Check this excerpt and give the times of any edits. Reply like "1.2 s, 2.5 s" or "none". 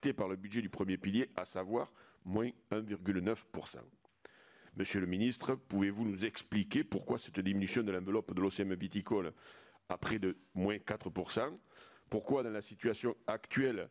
none